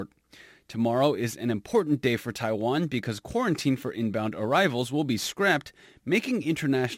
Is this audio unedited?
yes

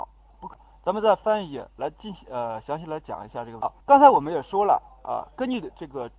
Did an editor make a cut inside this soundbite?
yes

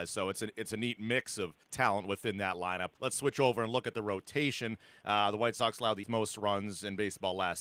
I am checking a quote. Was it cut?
yes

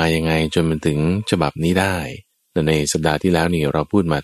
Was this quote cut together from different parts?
yes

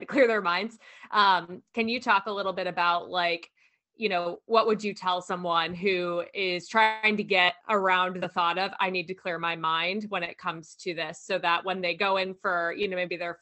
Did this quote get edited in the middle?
yes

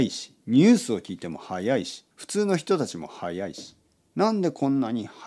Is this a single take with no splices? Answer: no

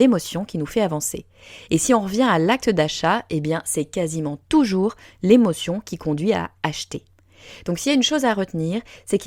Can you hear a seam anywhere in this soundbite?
no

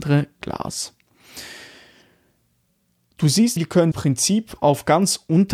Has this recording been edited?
yes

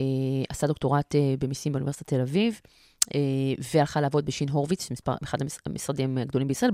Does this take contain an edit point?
no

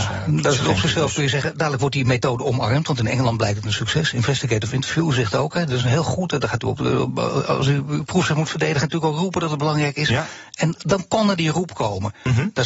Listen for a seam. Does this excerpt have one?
no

